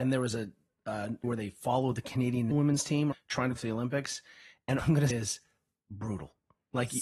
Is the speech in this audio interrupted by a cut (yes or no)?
yes